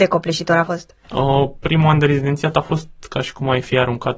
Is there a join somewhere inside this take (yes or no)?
no